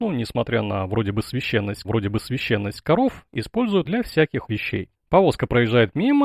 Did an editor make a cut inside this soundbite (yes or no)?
yes